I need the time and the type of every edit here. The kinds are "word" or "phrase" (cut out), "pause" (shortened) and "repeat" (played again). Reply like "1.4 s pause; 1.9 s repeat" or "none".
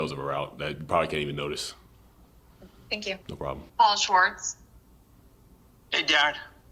3.2 s pause; 3.7 s pause